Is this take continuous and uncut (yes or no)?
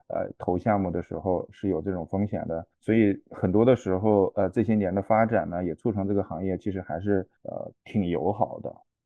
no